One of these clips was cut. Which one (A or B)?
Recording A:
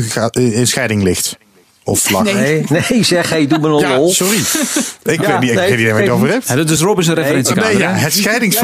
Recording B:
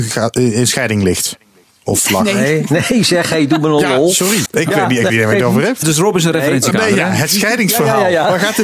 B